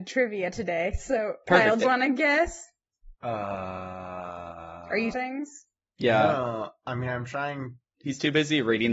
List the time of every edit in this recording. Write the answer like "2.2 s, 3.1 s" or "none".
1.8 s, 3.1 s, 5.1 s